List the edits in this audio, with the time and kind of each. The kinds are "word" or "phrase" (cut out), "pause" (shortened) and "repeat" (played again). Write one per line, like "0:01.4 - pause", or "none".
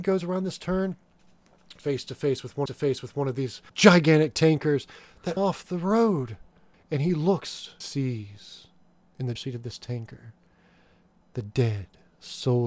0:01.8 - word
0:02.7 - repeat
0:03.7 - pause
0:05.4 - phrase
0:07.8 - word
0:09.4 - word